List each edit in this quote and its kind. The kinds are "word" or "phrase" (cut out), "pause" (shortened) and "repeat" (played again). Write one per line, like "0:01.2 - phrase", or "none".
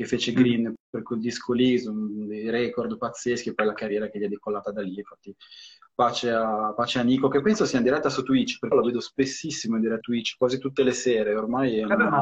0:08.7 - word
0:10.0 - word